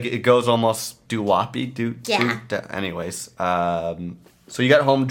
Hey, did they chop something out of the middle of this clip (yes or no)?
yes